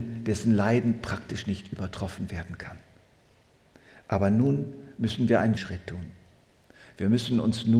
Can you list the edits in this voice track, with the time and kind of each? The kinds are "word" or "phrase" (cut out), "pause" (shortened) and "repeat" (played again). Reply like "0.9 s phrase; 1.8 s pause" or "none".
5.6 s word